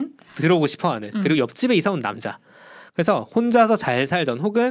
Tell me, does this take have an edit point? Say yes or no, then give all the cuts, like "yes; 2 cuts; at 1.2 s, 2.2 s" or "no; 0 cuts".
no; 0 cuts